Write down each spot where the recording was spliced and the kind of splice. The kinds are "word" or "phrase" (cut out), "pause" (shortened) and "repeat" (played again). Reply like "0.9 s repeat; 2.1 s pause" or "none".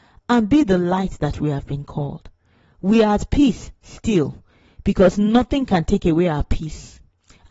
none